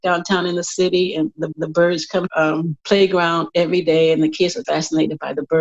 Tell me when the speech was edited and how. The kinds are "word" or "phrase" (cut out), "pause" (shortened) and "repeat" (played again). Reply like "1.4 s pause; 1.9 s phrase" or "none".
1.5 s repeat; 2.3 s phrase; 2.8 s pause; 4.6 s word